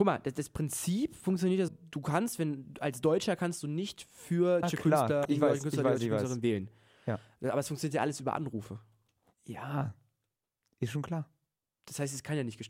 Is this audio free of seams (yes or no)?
no